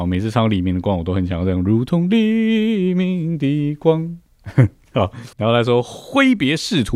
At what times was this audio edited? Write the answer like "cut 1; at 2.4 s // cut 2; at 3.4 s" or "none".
cut 1; at 5.3 s